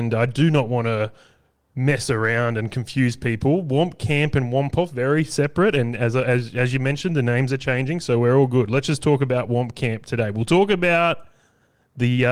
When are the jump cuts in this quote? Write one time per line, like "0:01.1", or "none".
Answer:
none